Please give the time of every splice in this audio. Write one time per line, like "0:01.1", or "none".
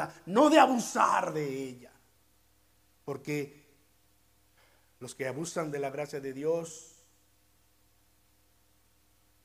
none